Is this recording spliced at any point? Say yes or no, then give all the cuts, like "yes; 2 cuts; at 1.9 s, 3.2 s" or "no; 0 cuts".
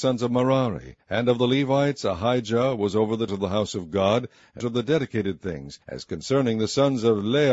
yes; 4 cuts; at 1.0 s, 3.3 s, 4.6 s, 5.8 s